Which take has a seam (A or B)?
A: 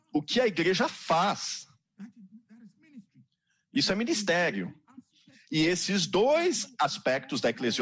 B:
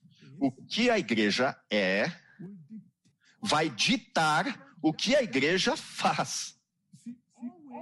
B